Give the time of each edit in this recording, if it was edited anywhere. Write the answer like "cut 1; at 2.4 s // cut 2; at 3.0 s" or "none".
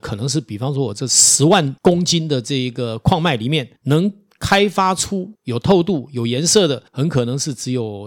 cut 1; at 1.8 s // cut 2; at 3.8 s // cut 3; at 5.4 s // cut 4; at 6.9 s